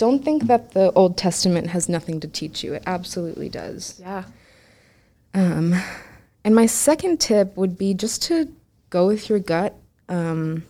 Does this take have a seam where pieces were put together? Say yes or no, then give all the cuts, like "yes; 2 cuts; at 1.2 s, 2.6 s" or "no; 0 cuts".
no; 0 cuts